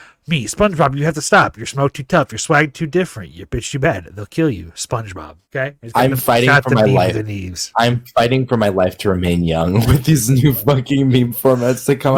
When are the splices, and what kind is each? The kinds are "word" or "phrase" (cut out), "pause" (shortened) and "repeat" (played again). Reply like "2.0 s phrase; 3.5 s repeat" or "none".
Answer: 5.4 s pause